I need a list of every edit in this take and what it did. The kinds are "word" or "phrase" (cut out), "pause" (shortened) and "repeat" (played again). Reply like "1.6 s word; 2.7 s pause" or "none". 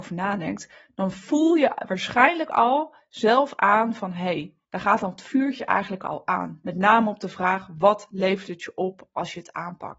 4.6 s pause